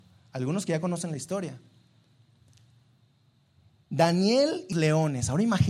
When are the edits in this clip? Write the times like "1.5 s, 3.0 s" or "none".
4.7 s